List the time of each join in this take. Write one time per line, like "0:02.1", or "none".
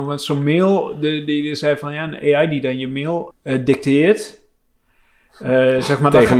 0:03.3